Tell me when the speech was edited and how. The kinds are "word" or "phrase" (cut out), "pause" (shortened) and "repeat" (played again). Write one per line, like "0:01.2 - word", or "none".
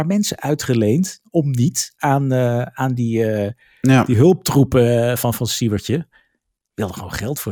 none